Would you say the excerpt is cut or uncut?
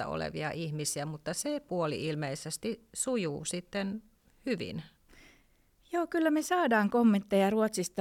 uncut